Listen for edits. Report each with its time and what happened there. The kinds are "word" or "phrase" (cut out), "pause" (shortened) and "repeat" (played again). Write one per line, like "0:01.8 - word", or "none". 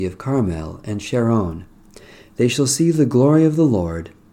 none